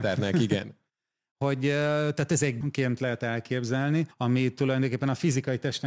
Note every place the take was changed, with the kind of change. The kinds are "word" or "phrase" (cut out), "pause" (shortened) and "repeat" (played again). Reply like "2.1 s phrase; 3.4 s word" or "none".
2.6 s word; 4.1 s pause